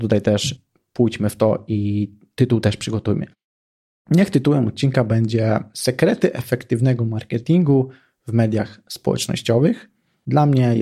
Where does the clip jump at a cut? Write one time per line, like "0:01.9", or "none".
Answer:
none